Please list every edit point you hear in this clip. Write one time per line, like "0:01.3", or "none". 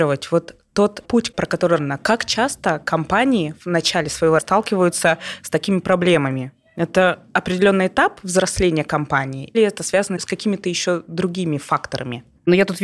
0:01.0
0:01.8
0:04.4
0:09.5